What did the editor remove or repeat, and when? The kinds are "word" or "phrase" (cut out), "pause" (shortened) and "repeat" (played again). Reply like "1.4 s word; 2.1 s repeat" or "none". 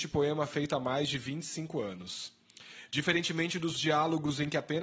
3.8 s word